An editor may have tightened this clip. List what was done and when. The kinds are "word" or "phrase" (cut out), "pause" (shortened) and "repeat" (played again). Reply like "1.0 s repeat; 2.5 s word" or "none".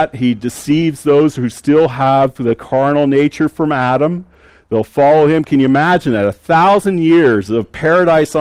none